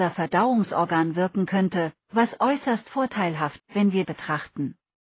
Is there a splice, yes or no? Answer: yes